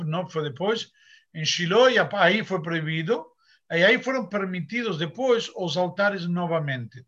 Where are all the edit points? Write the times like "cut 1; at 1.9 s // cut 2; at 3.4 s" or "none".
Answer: none